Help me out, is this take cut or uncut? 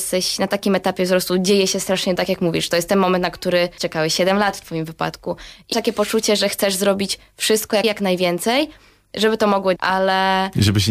cut